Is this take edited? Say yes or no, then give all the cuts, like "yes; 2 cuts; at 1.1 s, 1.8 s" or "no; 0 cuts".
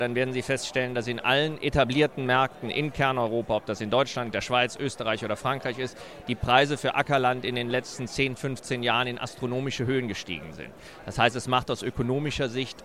no; 0 cuts